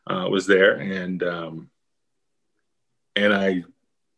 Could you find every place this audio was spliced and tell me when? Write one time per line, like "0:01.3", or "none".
none